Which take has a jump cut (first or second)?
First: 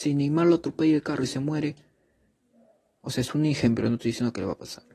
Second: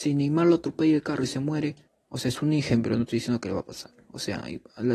second